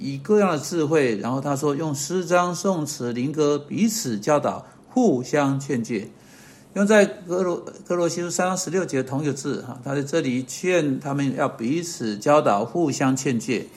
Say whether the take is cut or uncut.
uncut